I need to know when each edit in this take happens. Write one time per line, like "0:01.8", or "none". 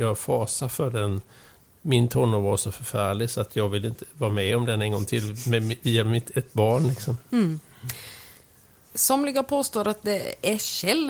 none